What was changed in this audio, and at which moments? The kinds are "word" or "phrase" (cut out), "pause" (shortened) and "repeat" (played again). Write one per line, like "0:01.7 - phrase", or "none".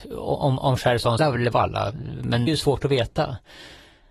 0:01.2 - phrase
0:01.5 - phrase
0:02.5 - phrase